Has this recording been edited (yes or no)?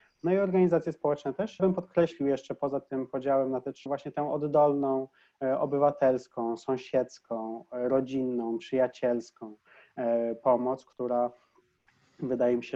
yes